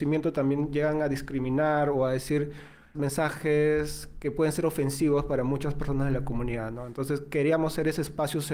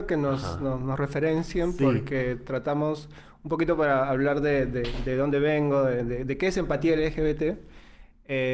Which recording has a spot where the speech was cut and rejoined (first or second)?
first